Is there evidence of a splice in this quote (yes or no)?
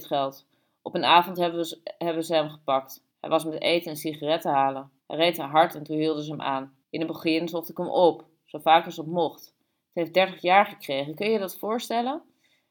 yes